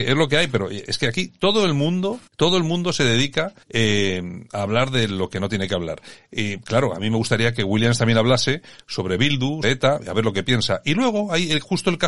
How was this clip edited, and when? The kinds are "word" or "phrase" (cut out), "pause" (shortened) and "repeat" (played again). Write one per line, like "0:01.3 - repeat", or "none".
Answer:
0:02.3 - pause
0:03.6 - pause
0:09.6 - word